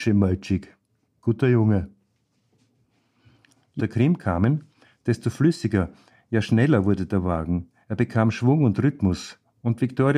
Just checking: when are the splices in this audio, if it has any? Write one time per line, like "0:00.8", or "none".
0:03.8